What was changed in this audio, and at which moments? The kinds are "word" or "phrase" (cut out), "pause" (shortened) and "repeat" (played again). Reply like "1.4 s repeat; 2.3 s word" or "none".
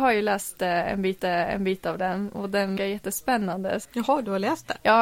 1.2 s repeat; 2.8 s word; 3.8 s word